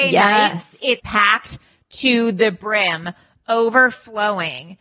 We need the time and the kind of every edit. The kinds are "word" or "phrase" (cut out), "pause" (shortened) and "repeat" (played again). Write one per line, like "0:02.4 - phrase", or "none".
0:01.0 - word